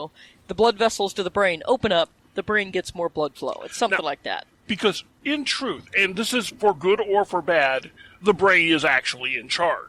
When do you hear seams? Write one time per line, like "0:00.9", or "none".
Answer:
none